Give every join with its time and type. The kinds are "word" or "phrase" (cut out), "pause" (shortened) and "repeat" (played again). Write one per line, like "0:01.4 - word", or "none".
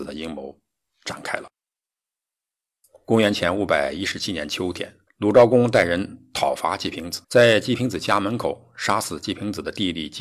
0:02.0 - pause
0:05.1 - pause
0:07.2 - pause